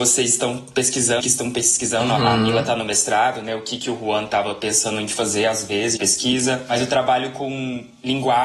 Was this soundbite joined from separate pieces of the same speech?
yes; 2 cuts; at 1.2 s, 6.0 s

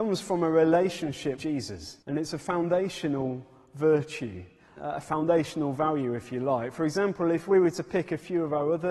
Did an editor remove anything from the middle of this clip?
yes; 3 cuts; at 1.4 s, 2.0 s, 4.8 s

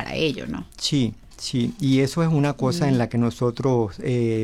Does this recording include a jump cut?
no; 0 cuts

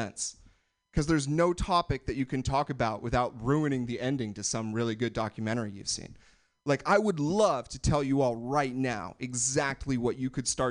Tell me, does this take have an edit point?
no; 0 cuts

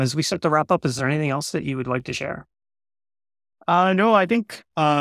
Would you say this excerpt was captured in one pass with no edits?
yes; 0 cuts

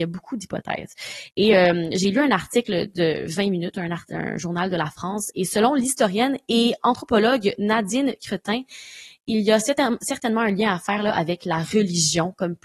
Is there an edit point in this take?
no; 0 cuts

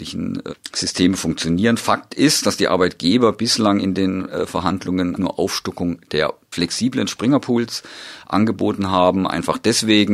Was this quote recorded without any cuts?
no; 2 cuts; at 5.2 s, 6.5 s

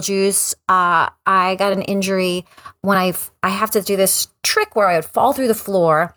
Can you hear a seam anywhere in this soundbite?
no; 0 cuts

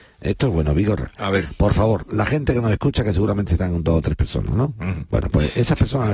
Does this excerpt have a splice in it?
no; 0 cuts

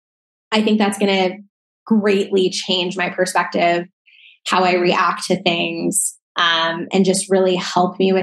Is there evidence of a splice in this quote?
yes; 1 cut; at 6.2 s

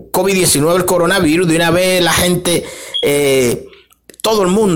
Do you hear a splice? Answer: no; 0 cuts

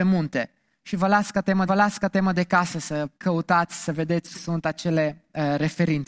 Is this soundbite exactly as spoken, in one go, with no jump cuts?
no; 3 cuts; at 1.7 s, 3.2 s, 4.3 s

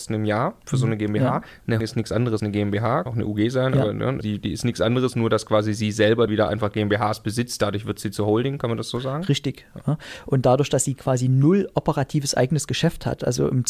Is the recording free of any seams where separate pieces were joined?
no; 5 cuts; at 1.8 s, 2.4 s, 3.1 s, 4.2 s, 6.3 s

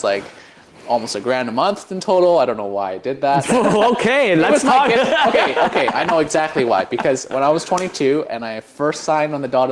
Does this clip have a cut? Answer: no; 0 cuts

